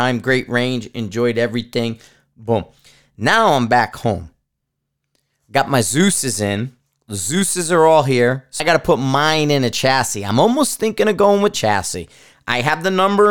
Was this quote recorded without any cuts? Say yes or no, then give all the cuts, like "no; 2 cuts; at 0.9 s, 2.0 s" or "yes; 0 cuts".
no; 2 cuts; at 8.6 s, 11.5 s